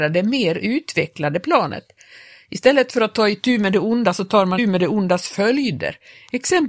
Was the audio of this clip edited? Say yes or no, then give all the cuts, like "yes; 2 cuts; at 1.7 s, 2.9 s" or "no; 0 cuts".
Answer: yes; 1 cut; at 4.6 s